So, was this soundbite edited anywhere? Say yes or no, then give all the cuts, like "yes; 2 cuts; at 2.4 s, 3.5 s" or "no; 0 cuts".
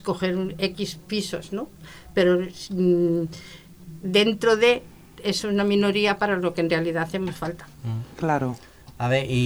no; 0 cuts